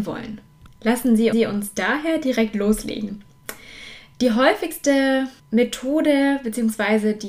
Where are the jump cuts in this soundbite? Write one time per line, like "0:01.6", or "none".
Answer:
0:01.3
0:05.4

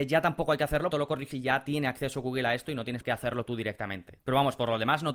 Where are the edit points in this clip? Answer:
0:00.9
0:01.3
0:03.0

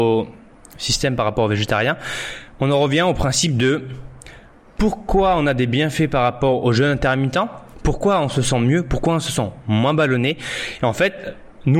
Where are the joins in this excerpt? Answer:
none

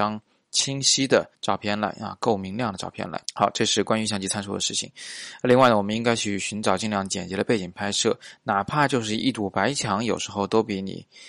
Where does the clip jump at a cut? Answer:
0:01.3
0:03.2

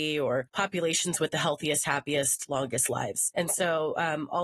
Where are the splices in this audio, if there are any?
none

